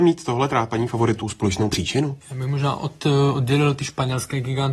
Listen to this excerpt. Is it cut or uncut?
cut